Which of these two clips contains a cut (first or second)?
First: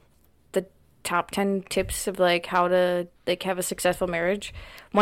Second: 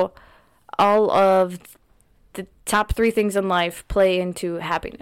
first